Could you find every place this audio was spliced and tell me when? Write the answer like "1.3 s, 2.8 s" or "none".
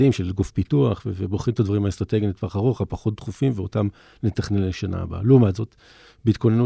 none